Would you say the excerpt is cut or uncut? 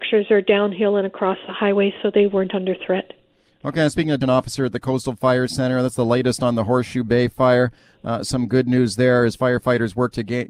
cut